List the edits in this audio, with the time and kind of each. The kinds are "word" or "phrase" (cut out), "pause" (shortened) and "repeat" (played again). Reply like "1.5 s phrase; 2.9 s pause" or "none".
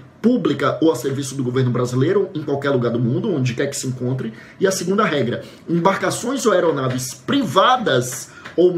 none